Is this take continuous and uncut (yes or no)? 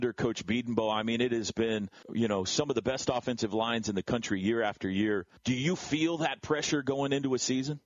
no